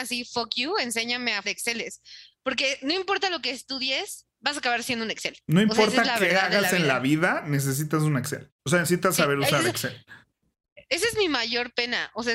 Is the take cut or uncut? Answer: cut